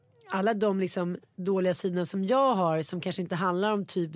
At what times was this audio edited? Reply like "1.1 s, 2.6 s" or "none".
none